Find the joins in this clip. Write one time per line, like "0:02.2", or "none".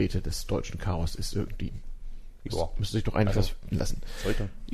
0:03.7